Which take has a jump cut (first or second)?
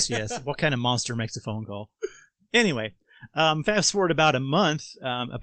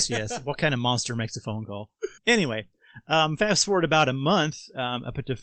second